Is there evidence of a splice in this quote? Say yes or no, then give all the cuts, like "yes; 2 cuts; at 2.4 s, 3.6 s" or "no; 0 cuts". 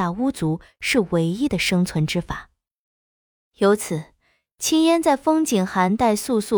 no; 0 cuts